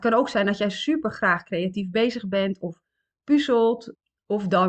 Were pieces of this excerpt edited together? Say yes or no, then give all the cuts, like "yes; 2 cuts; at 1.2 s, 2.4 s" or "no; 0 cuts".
no; 0 cuts